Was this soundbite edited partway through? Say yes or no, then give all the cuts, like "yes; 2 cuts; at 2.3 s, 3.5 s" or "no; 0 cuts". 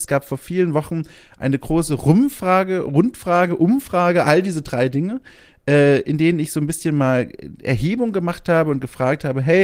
no; 0 cuts